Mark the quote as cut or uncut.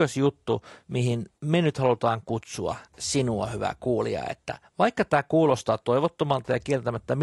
cut